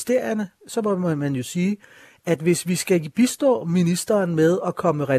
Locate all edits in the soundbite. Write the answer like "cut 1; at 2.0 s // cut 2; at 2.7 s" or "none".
none